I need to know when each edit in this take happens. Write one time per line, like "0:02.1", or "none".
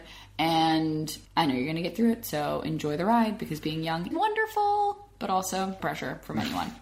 0:01.3
0:04.1
0:05.8